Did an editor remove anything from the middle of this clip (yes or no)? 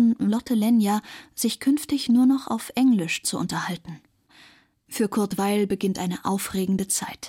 no